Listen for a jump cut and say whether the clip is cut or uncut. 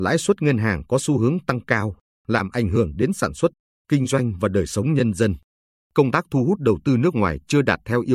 uncut